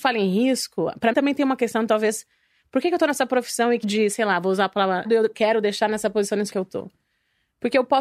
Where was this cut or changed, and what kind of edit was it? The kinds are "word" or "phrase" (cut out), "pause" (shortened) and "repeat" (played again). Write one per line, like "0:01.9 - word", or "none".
0:01.1 - word
0:03.8 - word
0:05.0 - word
0:06.5 - word